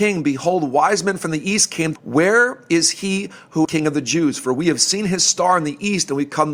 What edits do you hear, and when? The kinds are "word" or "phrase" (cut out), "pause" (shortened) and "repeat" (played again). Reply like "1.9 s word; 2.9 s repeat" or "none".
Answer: 2.0 s phrase; 3.6 s phrase

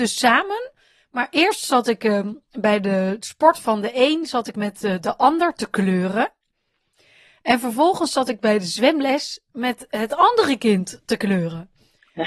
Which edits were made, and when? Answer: none

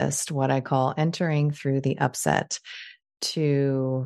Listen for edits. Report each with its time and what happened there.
none

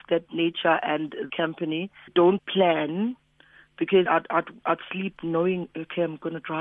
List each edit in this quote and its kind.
1.3 s word; 2.1 s word; 2.4 s word; 4.1 s word

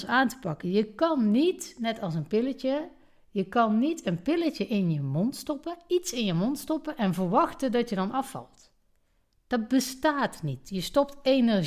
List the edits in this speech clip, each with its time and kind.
none

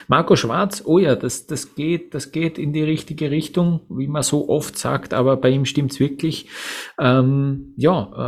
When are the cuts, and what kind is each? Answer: none

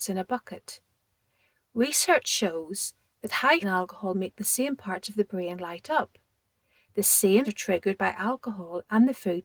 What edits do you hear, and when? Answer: 3.6 s phrase; 7.4 s word

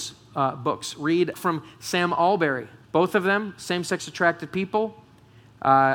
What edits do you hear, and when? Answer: 1.3 s phrase; 2.8 s pause

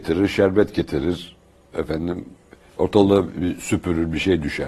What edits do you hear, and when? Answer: none

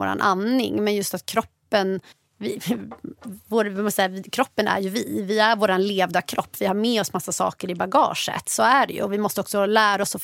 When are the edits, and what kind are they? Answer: 2.1 s pause

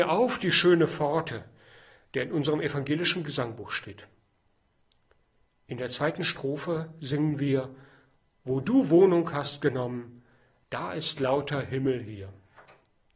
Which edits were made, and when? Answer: none

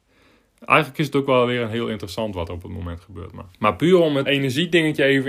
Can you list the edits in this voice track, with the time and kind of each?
3.5 s pause; 4.3 s word

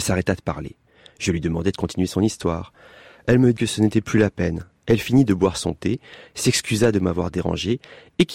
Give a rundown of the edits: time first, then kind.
3.6 s word

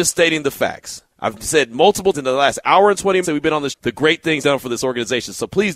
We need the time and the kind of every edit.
1.1 s word; 2.1 s word; 3.2 s word; 3.7 s word; 4.4 s word

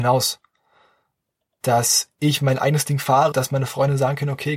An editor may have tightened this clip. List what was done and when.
3.3 s word

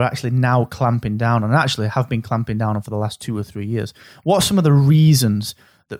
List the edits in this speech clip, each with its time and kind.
none

